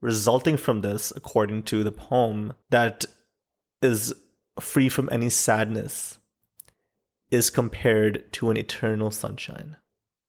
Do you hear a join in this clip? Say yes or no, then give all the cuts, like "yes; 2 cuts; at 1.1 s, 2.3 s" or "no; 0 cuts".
yes; 1 cut; at 2.6 s